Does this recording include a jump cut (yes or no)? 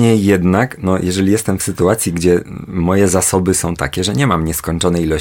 no